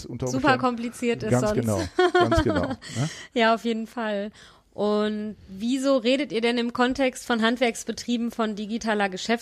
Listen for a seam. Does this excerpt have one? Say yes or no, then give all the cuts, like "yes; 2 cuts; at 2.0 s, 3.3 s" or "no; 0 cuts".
no; 0 cuts